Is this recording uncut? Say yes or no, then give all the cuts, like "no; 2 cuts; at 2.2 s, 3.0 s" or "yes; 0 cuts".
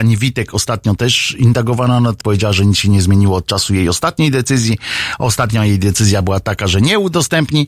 no; 1 cut; at 2.2 s